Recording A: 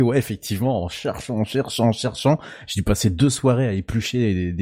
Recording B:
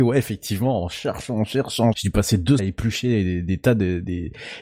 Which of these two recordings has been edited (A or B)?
B